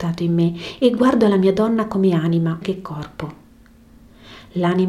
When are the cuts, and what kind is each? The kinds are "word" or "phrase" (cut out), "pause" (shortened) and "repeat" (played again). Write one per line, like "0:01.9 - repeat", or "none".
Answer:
0:02.6 - word